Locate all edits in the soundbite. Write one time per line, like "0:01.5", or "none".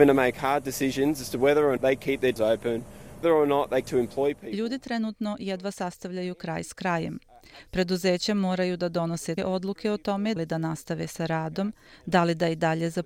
0:01.8
0:02.4
0:03.2
0:03.8
0:09.4
0:10.4